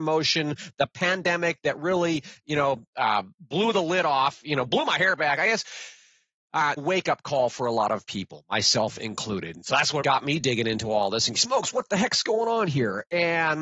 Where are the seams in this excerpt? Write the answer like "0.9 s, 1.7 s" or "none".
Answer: 3.3 s, 6.8 s, 10.0 s, 11.3 s